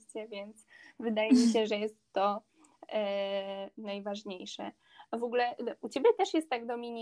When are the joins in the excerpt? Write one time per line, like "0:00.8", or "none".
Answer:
none